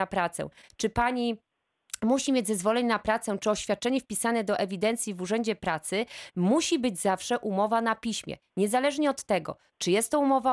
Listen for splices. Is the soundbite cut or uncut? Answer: uncut